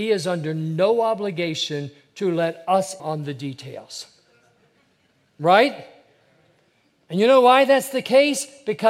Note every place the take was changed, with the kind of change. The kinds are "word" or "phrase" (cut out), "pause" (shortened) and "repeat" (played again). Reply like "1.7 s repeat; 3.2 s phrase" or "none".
3.0 s word